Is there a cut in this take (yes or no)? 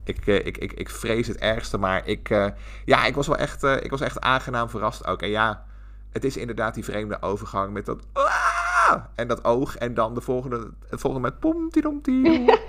no